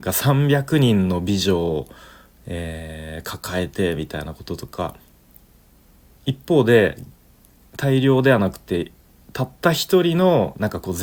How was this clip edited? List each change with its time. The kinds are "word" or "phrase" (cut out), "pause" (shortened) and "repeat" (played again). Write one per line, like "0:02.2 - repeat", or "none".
none